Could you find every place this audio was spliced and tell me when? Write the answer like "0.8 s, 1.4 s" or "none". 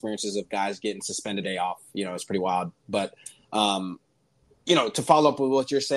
1.4 s